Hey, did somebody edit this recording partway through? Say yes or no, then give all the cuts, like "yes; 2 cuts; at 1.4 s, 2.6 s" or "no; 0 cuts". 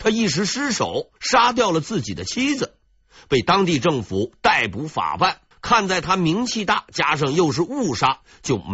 yes; 2 cuts; at 1.2 s, 5.5 s